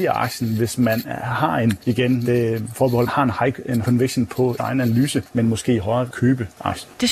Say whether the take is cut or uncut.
cut